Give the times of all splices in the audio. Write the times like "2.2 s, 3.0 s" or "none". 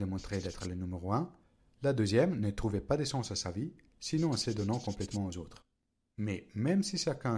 none